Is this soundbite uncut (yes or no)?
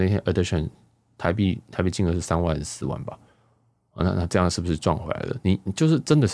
yes